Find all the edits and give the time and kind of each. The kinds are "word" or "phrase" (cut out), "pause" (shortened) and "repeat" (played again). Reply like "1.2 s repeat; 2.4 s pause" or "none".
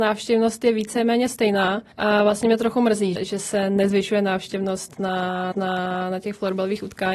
1.9 s pause; 3.2 s word; 5.5 s repeat